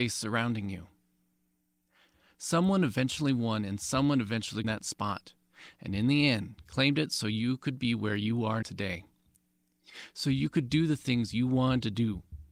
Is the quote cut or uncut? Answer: cut